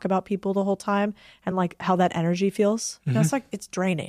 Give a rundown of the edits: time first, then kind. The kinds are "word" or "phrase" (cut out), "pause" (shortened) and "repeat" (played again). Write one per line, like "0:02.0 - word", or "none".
none